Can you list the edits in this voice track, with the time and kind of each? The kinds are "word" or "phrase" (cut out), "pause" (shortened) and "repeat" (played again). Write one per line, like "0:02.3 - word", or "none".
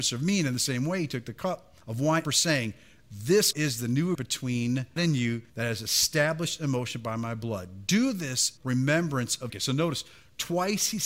0:01.8 - pause
0:02.2 - phrase
0:03.5 - word
0:04.1 - word
0:05.0 - word
0:05.5 - pause
0:08.6 - word
0:09.5 - phrase

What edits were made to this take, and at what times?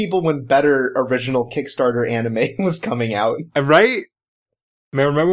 none

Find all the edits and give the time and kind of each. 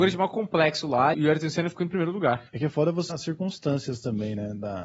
0:01.1 - phrase
0:02.5 - pause
0:03.1 - word

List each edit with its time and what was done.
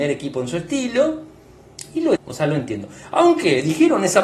0:02.2 - word

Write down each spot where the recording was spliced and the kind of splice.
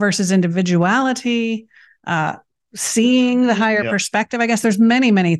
none

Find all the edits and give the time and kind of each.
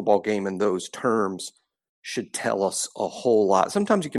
none

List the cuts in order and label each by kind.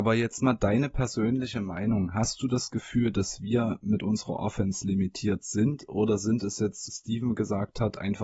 0:06.9 - phrase

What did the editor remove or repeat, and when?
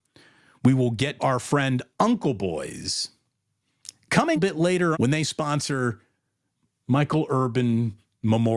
0:01.2 - word
0:04.4 - phrase
0:04.9 - word

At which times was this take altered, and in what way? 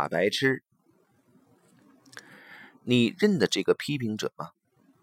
none

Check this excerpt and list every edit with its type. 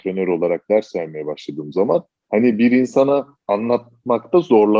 0:02.2 - pause
0:03.4 - phrase

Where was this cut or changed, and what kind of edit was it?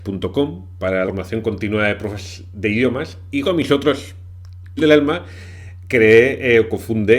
0:01.0 - word
0:03.4 - word
0:04.8 - word

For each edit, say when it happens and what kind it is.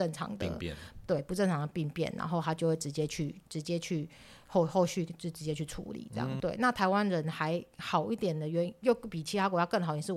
0:06.4 - phrase

